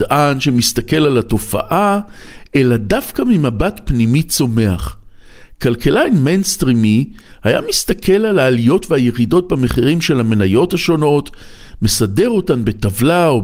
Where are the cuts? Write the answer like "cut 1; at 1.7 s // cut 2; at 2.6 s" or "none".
none